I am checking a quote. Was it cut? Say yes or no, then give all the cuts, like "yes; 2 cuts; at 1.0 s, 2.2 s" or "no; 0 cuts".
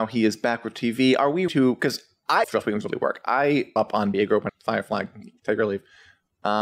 yes; 5 cuts; at 1.5 s, 2.4 s, 3.8 s, 4.1 s, 4.5 s